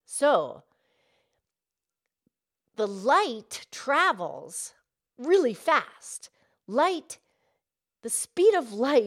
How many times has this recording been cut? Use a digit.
0